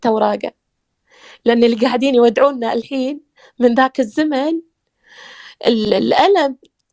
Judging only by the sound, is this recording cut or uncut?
uncut